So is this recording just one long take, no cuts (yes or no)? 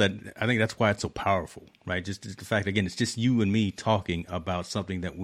yes